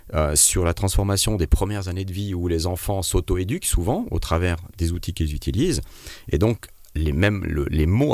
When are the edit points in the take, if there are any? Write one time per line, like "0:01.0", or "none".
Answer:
none